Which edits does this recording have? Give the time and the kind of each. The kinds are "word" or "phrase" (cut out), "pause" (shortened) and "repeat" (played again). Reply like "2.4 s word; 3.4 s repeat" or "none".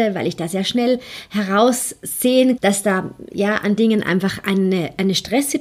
2.6 s word; 3.8 s word